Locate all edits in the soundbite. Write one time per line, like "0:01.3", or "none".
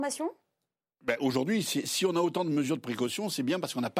none